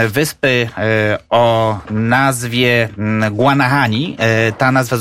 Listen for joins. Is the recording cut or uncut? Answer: uncut